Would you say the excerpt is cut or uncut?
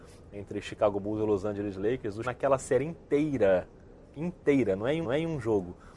cut